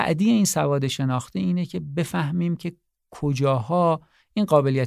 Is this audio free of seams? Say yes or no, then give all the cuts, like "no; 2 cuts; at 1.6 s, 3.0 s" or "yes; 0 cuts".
yes; 0 cuts